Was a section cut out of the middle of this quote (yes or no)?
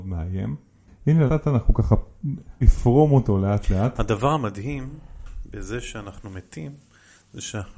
yes